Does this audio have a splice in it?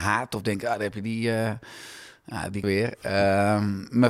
yes; 1 cut; at 2.6 s

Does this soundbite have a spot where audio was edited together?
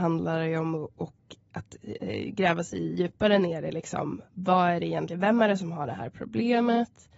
yes; 1 cut; at 4.3 s

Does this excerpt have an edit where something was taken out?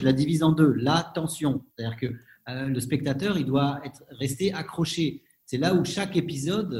no; 0 cuts

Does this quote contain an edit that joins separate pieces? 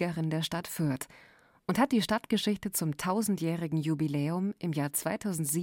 no; 0 cuts

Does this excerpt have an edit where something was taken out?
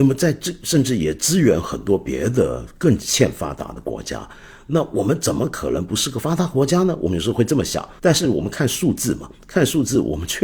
yes; 1 cut; at 8.0 s

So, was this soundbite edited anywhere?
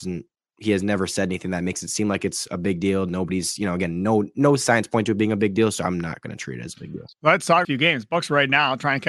yes; 1 cut; at 7.6 s

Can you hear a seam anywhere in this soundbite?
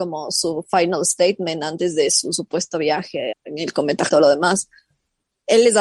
yes; 2 cuts; at 3.3 s, 4.1 s

